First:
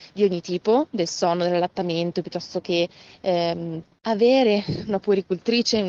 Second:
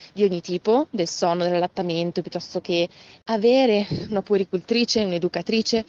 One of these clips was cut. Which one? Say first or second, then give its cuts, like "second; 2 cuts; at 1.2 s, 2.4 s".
second; 1 cut; at 3.2 s